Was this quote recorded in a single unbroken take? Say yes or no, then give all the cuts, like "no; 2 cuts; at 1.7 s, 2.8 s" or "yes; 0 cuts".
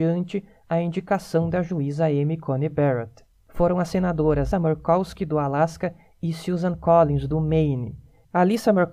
no; 1 cut; at 4.5 s